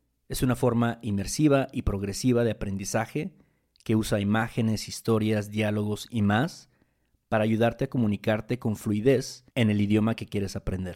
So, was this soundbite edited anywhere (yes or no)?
yes